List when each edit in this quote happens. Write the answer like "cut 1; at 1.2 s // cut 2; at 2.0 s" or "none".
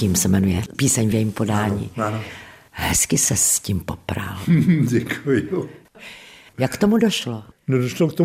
none